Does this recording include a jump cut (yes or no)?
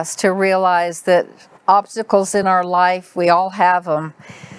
no